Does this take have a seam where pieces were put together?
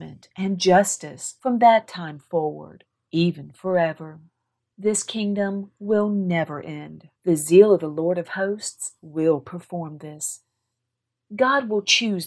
yes; 1 cut; at 7.2 s

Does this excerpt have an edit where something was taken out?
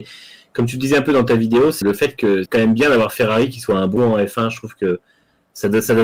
yes; 3 cuts; at 1.8 s, 2.5 s, 4.0 s

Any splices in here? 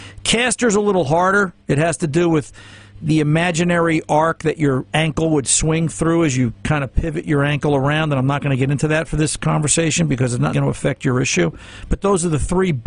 yes; 3 cuts; at 3.0 s, 4.9 s, 10.5 s

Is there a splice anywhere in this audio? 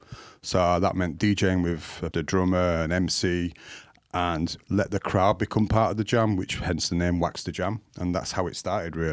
yes; 1 cut; at 2.1 s

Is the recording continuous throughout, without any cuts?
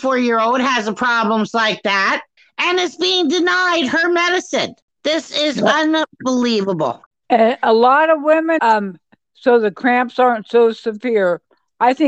no; 2 cuts; at 2.4 s, 8.6 s

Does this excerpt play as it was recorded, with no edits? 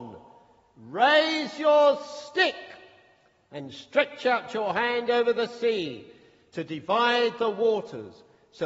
yes; 0 cuts

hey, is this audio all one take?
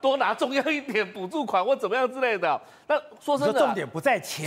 yes; 0 cuts

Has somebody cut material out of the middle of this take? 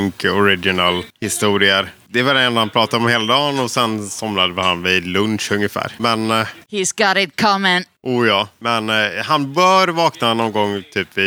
yes; 1 cut; at 6.6 s

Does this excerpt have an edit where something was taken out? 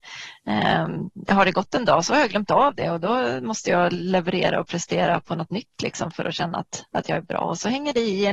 no; 0 cuts

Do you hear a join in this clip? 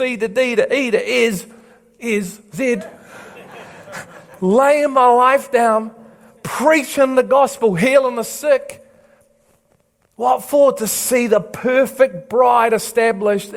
no; 0 cuts

